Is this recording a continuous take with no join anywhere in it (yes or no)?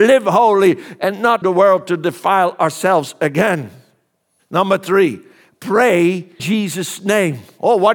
no